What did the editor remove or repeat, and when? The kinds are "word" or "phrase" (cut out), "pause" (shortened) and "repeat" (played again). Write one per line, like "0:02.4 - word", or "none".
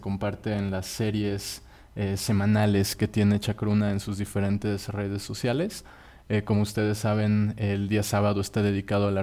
none